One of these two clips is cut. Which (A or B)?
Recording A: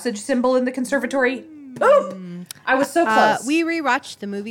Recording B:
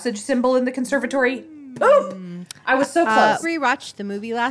B